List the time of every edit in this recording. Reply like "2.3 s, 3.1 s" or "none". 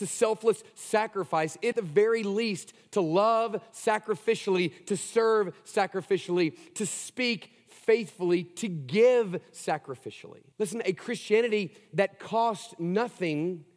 1.7 s, 10.5 s